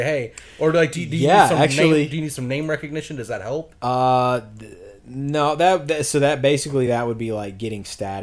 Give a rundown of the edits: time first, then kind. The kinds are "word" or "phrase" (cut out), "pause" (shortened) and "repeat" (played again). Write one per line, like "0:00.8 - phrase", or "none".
none